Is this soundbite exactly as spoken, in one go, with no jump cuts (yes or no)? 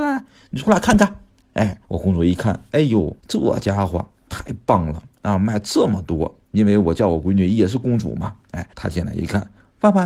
no